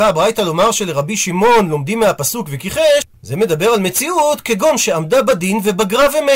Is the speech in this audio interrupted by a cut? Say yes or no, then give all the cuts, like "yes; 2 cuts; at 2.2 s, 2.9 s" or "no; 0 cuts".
no; 0 cuts